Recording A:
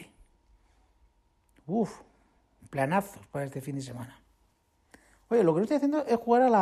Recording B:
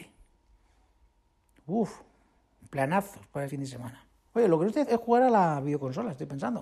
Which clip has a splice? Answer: B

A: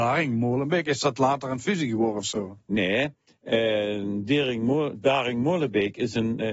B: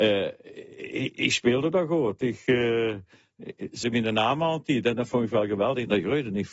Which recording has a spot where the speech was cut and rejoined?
B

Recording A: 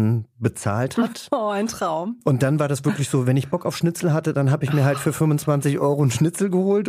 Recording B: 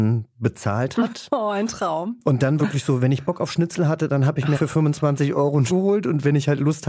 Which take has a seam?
B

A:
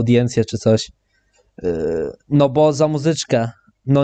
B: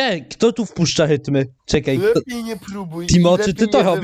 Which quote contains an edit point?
B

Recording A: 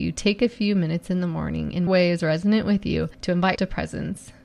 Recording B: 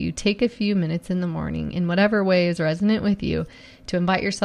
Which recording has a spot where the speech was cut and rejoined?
A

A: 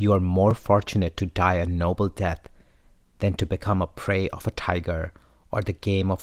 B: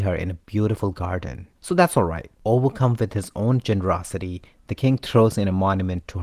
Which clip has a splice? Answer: B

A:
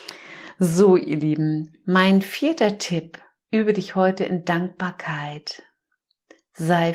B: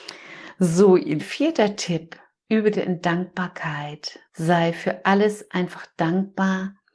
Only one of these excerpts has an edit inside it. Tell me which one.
B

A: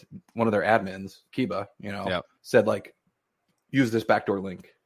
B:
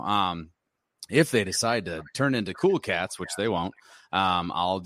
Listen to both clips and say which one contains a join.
A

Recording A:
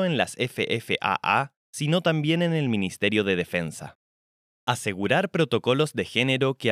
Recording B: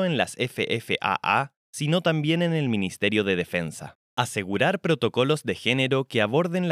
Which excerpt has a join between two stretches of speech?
B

